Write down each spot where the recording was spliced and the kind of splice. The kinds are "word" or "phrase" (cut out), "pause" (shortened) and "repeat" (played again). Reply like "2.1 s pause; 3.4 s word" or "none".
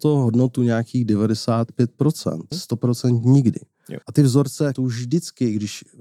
2.5 s word; 4.0 s pause; 4.8 s word